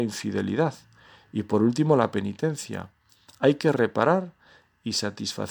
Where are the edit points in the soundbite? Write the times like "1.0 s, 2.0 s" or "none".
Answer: none